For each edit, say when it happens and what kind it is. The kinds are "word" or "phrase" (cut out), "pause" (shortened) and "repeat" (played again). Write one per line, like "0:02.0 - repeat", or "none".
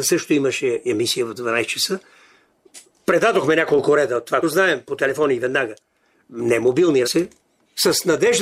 0:04.4 - word
0:07.0 - word

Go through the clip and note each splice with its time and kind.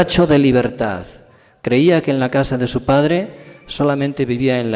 none

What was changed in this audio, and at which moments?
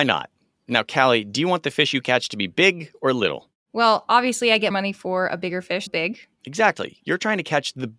0:04.7 - word
0:05.9 - word

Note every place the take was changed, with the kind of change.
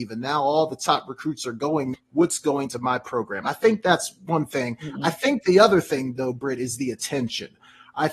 0:01.9 - word
0:02.7 - word

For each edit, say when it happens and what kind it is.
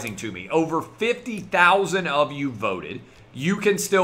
none

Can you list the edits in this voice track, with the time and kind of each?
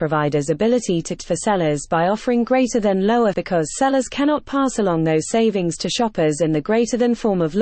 0:01.2 - word
0:03.3 - word

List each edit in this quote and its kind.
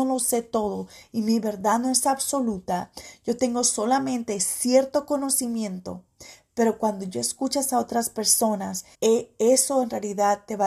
0:08.9 - pause

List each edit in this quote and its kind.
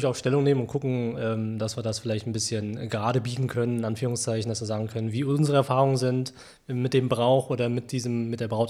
none

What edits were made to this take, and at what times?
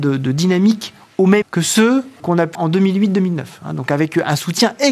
0:01.4 - word
0:02.2 - word
0:02.5 - word

